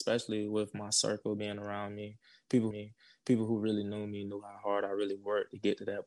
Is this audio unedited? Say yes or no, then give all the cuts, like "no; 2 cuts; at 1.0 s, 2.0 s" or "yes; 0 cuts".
no; 1 cut; at 2.7 s